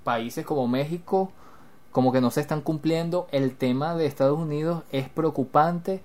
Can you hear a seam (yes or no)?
no